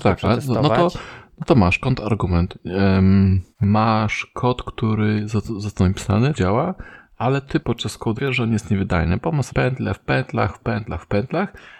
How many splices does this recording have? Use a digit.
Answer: 5